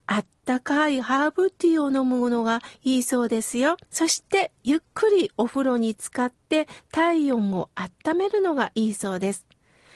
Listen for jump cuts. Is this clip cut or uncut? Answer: cut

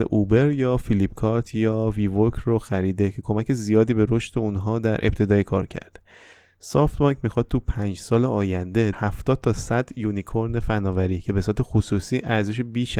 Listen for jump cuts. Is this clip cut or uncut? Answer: cut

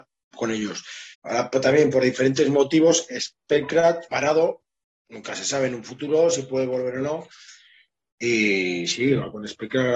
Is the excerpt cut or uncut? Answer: cut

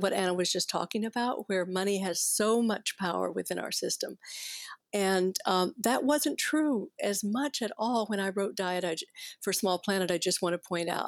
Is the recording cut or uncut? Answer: uncut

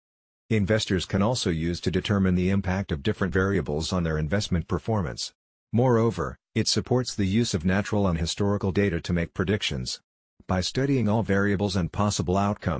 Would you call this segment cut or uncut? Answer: uncut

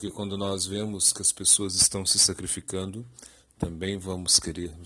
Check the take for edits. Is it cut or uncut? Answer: uncut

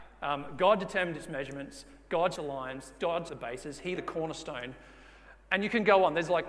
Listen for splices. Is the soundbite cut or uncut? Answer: cut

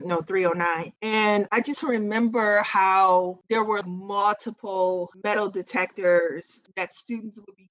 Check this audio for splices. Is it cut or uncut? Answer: cut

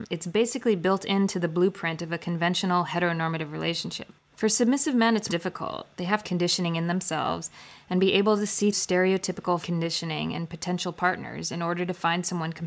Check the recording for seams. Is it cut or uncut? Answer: cut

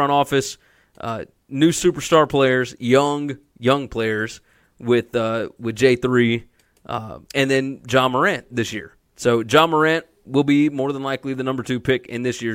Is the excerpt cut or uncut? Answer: cut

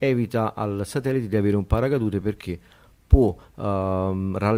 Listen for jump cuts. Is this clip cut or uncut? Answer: uncut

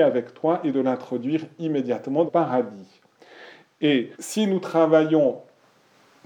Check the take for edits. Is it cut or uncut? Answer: cut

